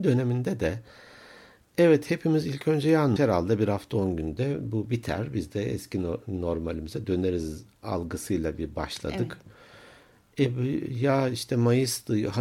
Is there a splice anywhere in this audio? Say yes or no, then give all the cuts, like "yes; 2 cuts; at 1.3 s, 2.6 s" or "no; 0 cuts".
yes; 1 cut; at 3.2 s